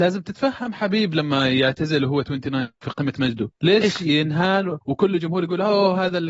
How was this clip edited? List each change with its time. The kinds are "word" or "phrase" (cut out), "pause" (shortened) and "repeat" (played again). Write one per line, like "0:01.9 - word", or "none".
0:02.8 - word
0:03.5 - pause
0:04.8 - pause